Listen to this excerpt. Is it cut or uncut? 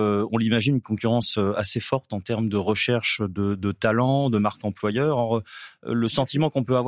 uncut